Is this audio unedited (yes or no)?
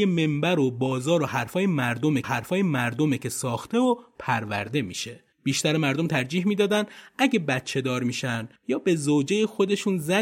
no